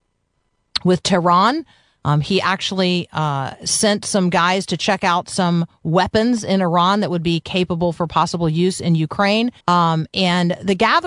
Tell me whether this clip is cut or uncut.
cut